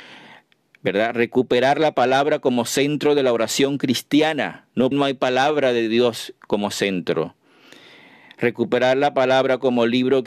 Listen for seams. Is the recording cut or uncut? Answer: cut